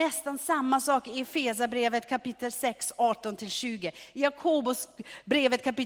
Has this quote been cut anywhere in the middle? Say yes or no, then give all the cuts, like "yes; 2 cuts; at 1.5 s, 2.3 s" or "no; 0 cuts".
no; 0 cuts